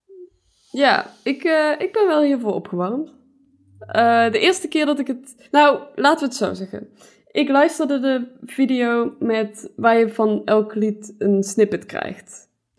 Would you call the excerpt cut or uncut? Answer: cut